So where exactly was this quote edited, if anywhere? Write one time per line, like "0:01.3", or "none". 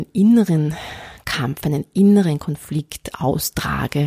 none